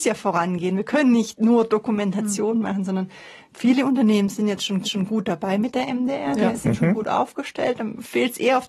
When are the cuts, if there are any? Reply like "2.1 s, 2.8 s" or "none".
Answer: 4.8 s